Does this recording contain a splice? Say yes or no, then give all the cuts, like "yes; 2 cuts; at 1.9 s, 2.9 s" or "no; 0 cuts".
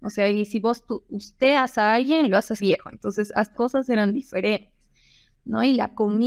yes; 2 cuts; at 2.6 s, 3.5 s